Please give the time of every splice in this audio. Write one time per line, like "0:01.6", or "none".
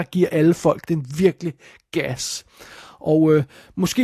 none